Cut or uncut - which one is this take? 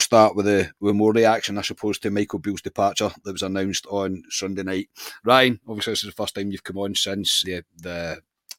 cut